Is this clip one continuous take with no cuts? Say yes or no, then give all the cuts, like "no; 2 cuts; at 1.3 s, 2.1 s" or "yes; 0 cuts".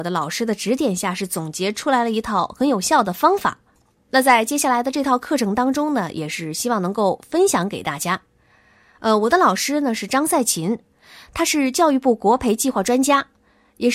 yes; 0 cuts